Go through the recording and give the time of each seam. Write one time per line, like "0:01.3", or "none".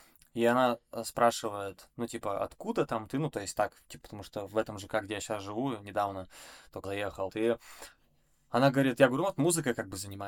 0:04.0
0:06.8
0:07.3